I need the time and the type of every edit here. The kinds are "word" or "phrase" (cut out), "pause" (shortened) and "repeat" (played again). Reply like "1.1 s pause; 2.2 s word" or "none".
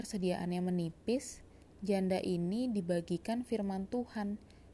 none